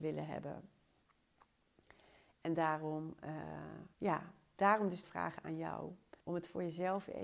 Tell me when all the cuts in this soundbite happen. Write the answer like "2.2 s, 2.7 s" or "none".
3.9 s, 5.0 s, 6.2 s